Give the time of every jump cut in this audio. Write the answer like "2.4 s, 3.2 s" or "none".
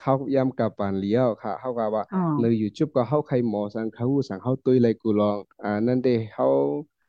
5.5 s